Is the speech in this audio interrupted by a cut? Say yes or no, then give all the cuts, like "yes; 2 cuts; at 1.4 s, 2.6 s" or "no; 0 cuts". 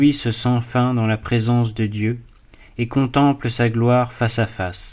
no; 0 cuts